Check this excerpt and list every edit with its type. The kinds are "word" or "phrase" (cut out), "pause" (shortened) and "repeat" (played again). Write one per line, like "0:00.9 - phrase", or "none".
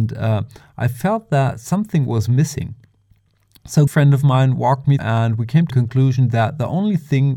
0:03.9 - word
0:05.0 - word
0:05.7 - word